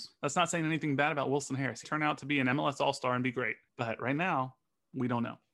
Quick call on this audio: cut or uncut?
cut